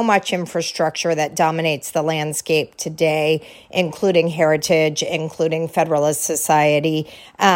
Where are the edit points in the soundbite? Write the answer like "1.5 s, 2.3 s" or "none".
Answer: none